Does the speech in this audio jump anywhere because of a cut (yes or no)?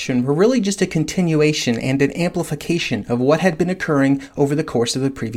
no